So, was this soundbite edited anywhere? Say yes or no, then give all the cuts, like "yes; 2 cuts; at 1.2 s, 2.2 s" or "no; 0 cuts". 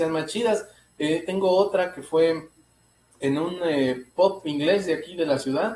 no; 0 cuts